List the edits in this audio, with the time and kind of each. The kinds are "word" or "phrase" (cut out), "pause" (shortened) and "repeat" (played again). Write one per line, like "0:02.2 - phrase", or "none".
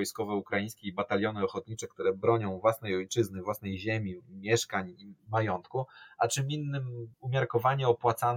0:05.2 - pause
0:07.1 - pause